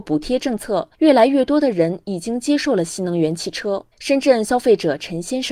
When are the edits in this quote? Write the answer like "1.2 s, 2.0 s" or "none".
0.9 s, 3.9 s